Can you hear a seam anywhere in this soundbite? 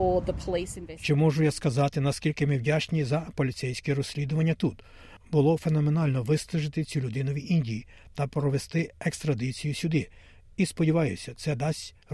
no; 0 cuts

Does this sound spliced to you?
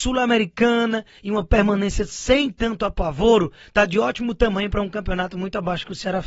no; 0 cuts

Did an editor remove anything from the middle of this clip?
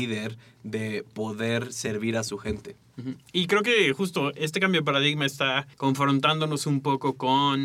yes; 1 cut; at 5.7 s

